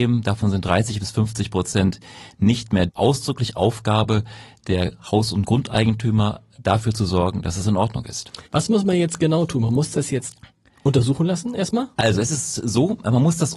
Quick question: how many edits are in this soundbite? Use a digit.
2